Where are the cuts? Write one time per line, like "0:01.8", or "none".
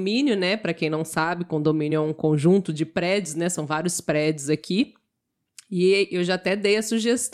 none